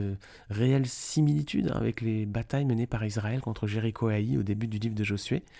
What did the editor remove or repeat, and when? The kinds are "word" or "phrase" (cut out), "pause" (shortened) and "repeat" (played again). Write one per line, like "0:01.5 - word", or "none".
none